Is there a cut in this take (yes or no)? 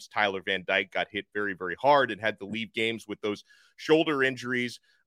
no